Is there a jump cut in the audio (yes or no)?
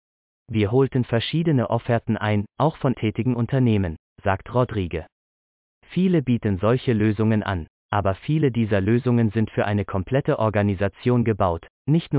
yes